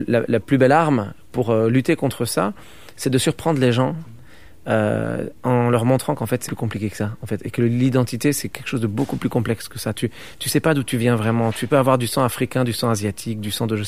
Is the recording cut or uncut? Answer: cut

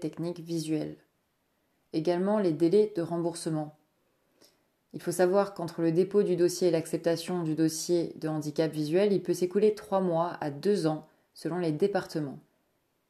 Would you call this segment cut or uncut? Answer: uncut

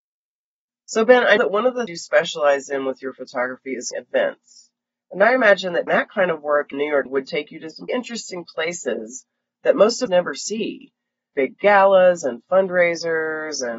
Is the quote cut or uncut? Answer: cut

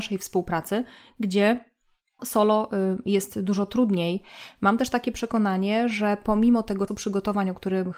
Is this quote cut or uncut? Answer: cut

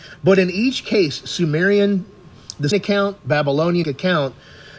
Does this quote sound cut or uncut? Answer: cut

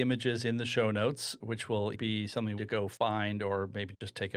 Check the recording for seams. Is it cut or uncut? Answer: cut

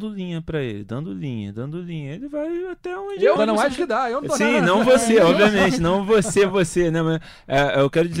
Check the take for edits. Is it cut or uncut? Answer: cut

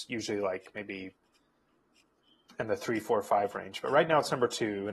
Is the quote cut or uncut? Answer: uncut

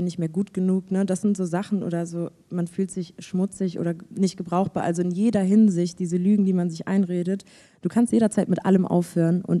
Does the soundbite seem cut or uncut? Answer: uncut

